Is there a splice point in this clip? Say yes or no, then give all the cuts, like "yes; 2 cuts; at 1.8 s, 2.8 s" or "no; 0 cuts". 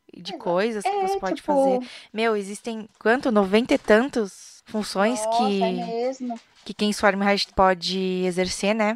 yes; 1 cut; at 7.5 s